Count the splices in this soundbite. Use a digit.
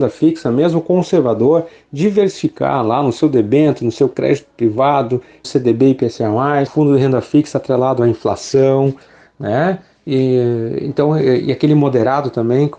2